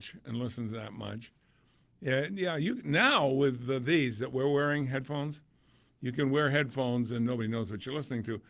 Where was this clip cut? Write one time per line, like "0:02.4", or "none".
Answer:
none